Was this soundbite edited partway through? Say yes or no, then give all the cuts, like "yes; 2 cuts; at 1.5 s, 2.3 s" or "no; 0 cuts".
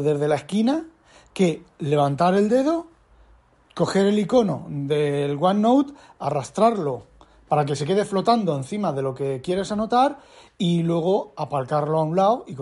no; 0 cuts